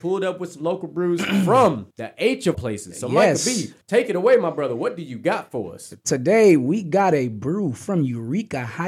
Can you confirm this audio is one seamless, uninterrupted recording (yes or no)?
no